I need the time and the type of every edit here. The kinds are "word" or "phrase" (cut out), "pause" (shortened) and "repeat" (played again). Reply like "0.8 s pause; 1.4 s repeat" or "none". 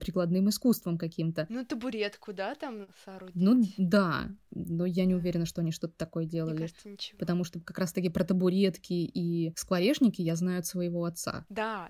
none